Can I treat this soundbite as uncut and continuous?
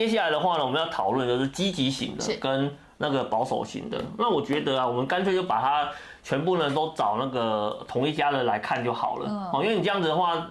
yes; 0 cuts

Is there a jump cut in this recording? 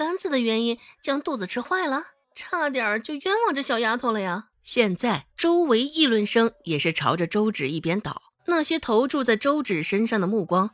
yes; 4 cuts; at 2.2 s, 4.5 s, 5.3 s, 8.4 s

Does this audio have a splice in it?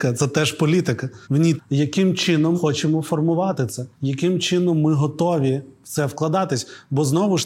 yes; 4 cuts; at 1.2 s, 1.6 s, 2.5 s, 3.9 s

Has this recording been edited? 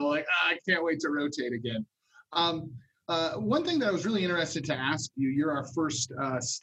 no; 0 cuts

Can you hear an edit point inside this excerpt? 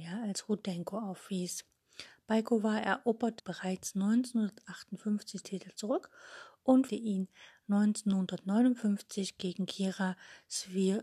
yes; 3 cuts; at 3.4 s, 5.4 s, 6.9 s

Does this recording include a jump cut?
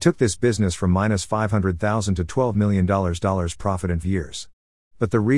yes; 1 cut; at 4.0 s

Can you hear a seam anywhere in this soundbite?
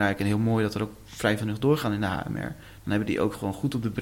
yes; 1 cut; at 1.4 s

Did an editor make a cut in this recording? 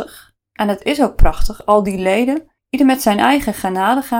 yes; 1 cut; at 2.6 s

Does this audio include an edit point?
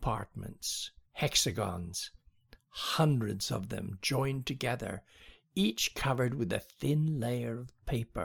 yes; 1 cut; at 1.0 s

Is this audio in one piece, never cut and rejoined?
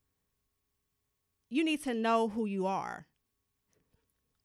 yes; 0 cuts

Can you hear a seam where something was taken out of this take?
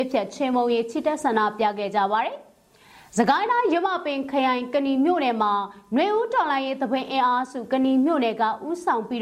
no; 0 cuts

